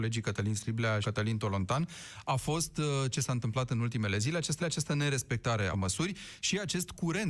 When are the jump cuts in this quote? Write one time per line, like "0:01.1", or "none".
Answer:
0:01.0
0:03.1
0:04.6
0:05.7